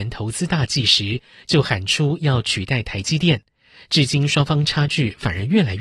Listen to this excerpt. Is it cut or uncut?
uncut